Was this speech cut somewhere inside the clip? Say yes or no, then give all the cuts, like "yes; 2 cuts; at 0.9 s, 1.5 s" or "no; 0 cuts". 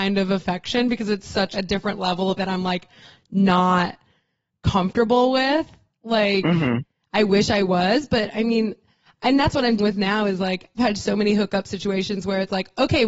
yes; 4 cuts; at 1.5 s, 2.4 s, 9.8 s, 10.8 s